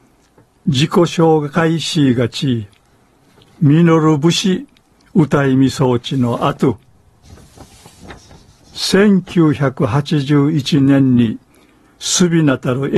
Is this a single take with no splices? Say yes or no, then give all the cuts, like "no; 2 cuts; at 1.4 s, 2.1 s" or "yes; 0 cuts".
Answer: yes; 0 cuts